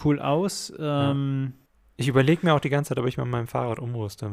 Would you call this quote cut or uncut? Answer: cut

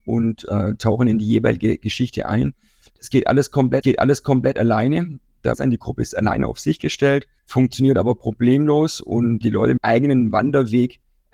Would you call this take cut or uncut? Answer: cut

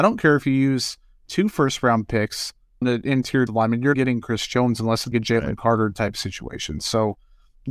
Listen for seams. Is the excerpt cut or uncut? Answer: cut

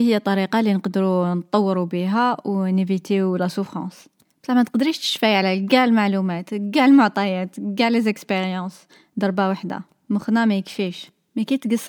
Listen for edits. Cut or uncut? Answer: uncut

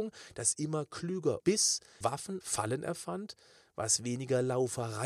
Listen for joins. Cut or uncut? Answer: cut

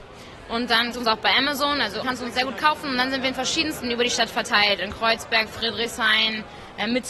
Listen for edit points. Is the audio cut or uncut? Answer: cut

